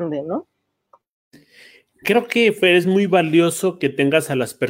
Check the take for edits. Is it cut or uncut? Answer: uncut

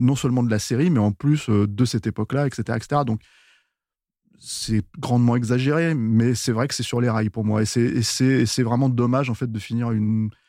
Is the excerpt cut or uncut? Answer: uncut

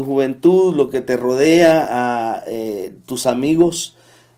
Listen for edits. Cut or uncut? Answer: uncut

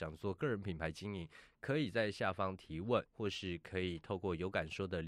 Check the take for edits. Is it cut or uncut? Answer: cut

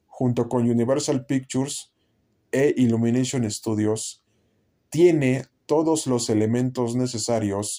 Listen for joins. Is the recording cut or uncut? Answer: uncut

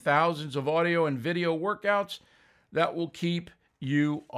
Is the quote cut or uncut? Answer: uncut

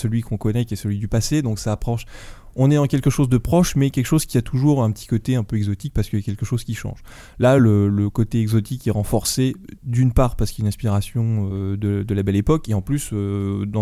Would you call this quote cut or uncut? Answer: uncut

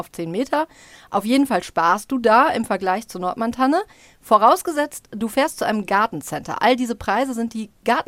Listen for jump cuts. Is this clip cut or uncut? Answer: uncut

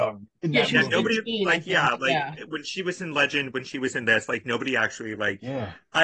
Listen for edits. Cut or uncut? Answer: uncut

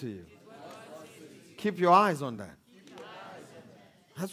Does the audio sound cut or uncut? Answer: uncut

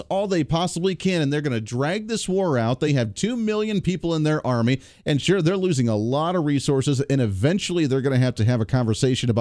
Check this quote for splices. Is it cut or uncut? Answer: uncut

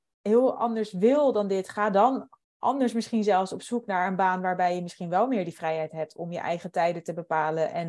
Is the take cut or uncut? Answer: uncut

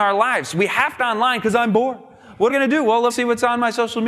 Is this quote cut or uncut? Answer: cut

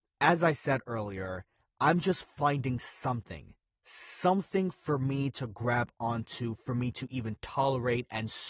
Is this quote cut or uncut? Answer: uncut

